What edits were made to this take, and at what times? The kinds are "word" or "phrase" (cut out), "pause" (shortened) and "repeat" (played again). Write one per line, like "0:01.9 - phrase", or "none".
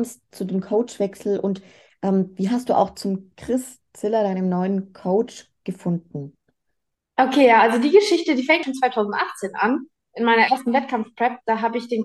0:08.6 - word